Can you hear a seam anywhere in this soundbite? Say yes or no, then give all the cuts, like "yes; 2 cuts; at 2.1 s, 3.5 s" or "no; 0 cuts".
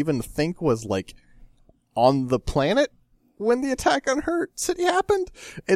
no; 0 cuts